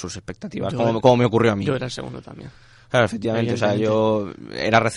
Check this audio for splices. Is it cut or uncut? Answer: uncut